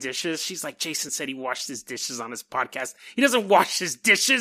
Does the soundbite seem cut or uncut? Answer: uncut